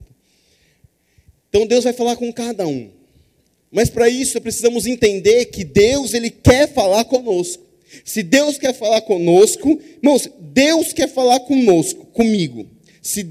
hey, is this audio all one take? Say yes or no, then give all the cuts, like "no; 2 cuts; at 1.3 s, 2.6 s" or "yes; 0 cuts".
yes; 0 cuts